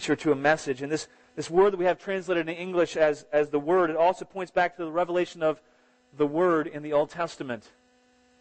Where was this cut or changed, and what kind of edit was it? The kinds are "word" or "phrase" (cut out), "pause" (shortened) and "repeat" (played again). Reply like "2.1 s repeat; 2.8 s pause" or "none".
none